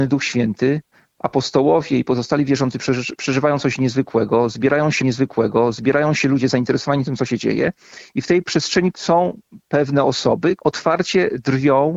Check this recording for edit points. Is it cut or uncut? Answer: cut